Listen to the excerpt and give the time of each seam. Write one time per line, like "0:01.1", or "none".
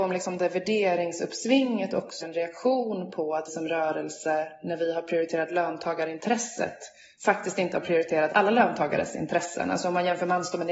0:02.2
0:03.5
0:08.3